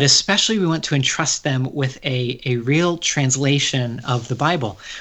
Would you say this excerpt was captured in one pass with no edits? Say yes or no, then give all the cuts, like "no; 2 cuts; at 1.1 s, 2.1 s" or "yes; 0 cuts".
yes; 0 cuts